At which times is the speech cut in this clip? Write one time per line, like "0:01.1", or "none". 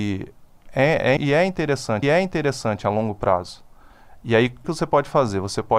0:01.2
0:02.0
0:04.6